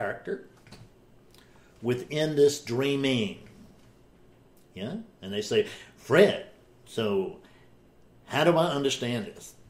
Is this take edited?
no; 0 cuts

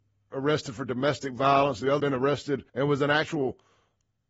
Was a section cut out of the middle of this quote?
yes; 2 cuts; at 2.0 s, 2.7 s

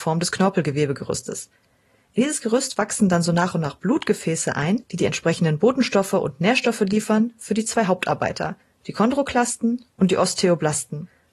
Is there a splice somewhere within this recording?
no; 0 cuts

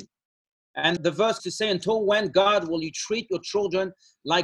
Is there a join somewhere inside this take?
yes; 2 cuts; at 1.0 s, 1.4 s

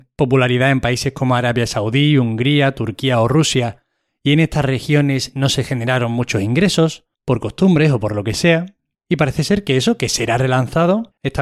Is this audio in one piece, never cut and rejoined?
no; 1 cut; at 7.1 s

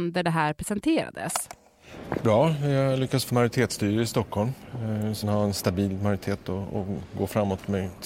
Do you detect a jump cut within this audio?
yes; 3 cuts; at 2.2 s, 3.3 s, 5.2 s

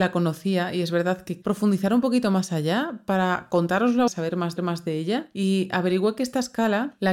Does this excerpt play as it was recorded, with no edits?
no; 3 cuts; at 1.4 s, 4.1 s, 4.6 s

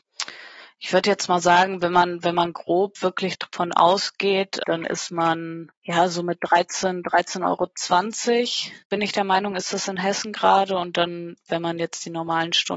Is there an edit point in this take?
yes; 1 cut; at 4.6 s

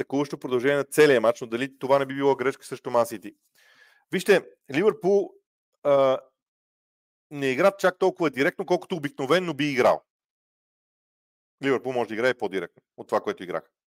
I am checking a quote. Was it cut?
no; 0 cuts

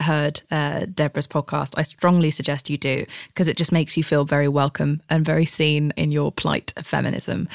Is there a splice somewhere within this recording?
yes; 1 cut; at 5.9 s

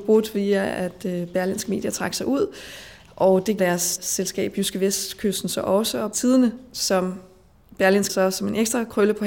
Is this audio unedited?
no; 4 cuts; at 3.6 s, 4.0 s, 6.1 s, 8.1 s

